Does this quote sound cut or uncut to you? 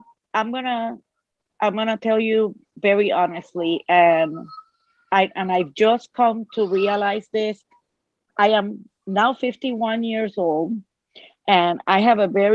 uncut